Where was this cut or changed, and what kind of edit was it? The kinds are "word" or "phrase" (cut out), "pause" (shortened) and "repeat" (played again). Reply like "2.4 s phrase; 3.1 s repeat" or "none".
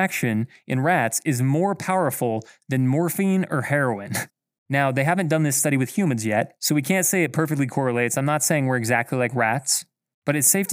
4.3 s pause